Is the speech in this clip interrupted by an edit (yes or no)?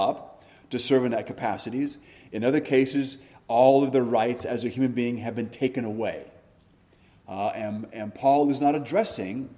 no